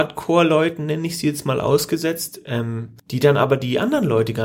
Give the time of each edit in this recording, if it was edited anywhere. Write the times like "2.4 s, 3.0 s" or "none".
3.0 s